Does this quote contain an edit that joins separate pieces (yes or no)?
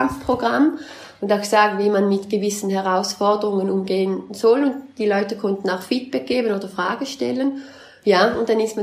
no